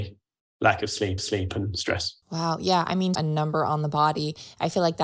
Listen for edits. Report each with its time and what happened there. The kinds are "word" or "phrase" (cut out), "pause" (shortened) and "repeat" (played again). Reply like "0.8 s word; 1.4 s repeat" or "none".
1.2 s repeat; 2.2 s pause; 3.1 s phrase